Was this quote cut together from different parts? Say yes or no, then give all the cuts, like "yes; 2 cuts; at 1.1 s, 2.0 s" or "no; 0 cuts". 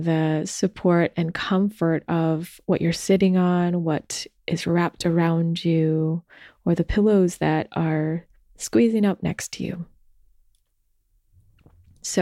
no; 0 cuts